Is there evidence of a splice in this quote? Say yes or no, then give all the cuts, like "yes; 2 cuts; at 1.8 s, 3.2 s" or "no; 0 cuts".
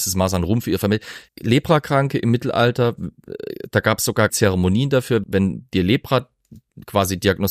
yes; 3 cuts; at 1.3 s, 4.3 s, 5.2 s